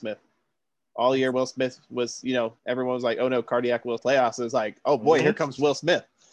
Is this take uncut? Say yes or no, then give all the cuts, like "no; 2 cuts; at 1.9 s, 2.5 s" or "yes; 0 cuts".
no; 2 cuts; at 2.6 s, 4.0 s